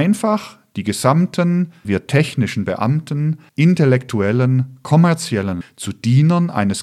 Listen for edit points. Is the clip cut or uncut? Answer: cut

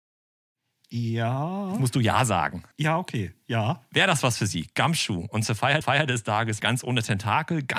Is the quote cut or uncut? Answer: cut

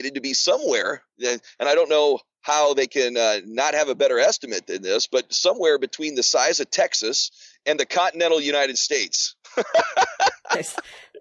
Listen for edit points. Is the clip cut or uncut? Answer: uncut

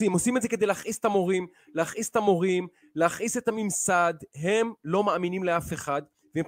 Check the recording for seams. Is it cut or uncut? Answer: uncut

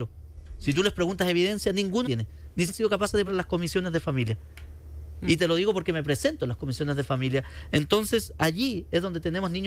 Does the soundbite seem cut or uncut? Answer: cut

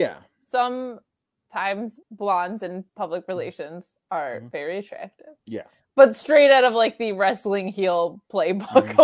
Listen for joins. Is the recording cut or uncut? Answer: cut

